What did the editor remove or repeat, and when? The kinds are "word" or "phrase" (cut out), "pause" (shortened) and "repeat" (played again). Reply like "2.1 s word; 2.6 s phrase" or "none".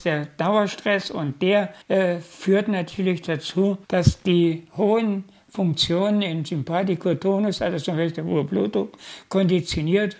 1.8 s pause; 3.8 s pause